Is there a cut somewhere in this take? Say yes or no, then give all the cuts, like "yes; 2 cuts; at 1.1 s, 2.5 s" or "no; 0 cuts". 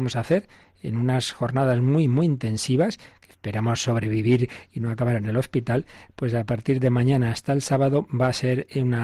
no; 0 cuts